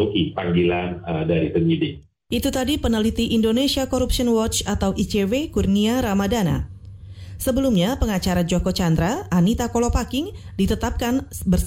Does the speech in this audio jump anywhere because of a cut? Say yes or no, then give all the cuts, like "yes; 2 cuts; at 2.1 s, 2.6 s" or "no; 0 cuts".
no; 0 cuts